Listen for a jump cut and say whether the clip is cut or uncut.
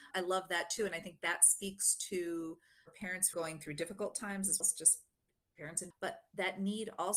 cut